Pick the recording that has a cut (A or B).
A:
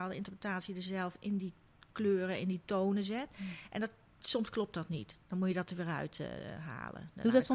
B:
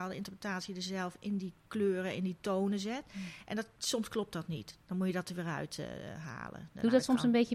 B